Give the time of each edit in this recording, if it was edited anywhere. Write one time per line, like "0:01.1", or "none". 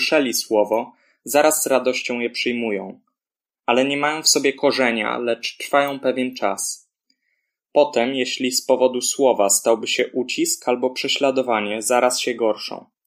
none